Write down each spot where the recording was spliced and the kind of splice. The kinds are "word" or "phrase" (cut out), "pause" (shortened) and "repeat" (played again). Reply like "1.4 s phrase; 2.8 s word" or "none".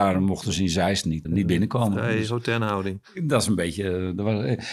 1.2 s word